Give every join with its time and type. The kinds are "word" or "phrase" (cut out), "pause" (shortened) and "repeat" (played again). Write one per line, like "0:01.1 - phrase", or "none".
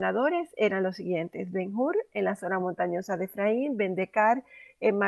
none